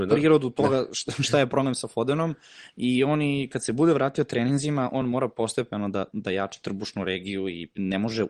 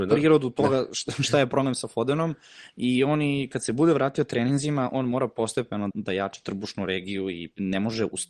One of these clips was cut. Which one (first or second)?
second